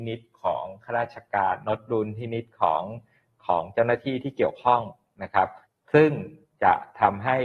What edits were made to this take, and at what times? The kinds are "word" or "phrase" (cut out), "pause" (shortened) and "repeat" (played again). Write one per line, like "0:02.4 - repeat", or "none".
0:05.6 - pause